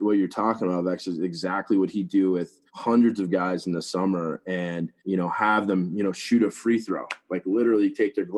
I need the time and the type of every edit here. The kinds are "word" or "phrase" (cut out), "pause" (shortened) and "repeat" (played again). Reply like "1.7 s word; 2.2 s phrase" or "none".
2.7 s pause; 5.0 s pause